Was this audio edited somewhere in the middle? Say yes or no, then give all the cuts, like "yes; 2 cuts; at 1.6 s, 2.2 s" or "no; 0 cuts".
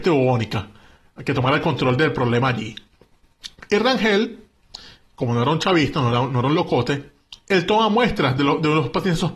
no; 0 cuts